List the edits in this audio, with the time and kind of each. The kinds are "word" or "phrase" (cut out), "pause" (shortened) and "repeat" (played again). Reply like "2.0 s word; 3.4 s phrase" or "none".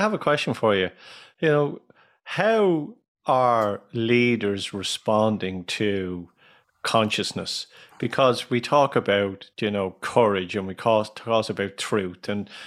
none